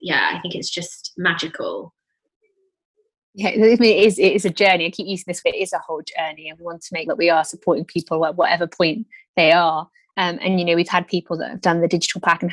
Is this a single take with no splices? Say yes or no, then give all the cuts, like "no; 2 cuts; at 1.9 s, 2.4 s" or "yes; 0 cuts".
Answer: no; 2 cuts; at 5.4 s, 7.1 s